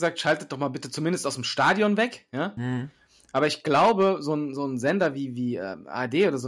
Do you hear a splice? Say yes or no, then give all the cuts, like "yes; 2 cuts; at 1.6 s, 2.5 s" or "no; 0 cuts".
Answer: no; 0 cuts